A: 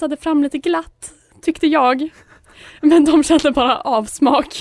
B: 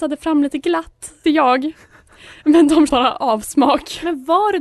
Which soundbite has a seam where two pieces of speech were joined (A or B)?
B